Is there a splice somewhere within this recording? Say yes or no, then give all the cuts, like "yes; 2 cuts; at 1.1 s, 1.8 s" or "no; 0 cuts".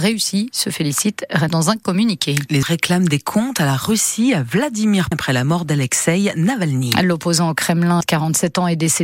yes; 4 cuts; at 1.5 s, 2.6 s, 5.1 s, 8.0 s